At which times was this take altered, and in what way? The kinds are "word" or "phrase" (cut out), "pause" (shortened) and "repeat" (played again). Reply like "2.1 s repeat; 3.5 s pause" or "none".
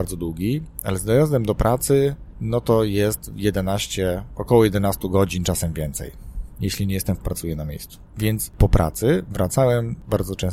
7.2 s phrase; 8.5 s word